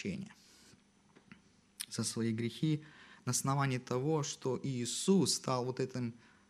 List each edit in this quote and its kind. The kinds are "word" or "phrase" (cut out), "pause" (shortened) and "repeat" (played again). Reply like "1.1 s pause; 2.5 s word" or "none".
none